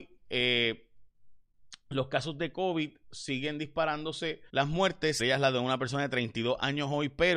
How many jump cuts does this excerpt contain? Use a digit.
2